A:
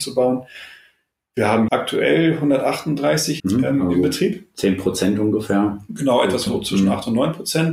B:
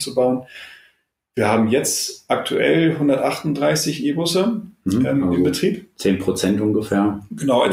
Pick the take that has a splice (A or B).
A